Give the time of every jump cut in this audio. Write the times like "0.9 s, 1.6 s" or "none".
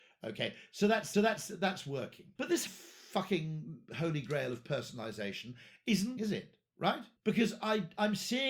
1.1 s, 2.4 s, 2.7 s, 3.9 s, 6.2 s, 7.2 s